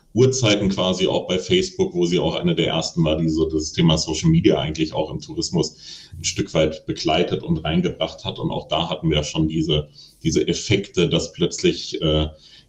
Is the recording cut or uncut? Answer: uncut